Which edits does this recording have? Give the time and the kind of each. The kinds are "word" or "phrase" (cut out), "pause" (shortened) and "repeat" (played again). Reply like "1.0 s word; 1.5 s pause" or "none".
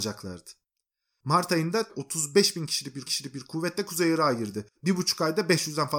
1.9 s phrase; 3.1 s repeat; 4.8 s pause